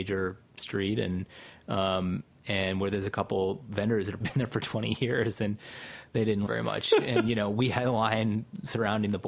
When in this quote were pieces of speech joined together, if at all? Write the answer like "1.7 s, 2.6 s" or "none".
4.2 s, 6.5 s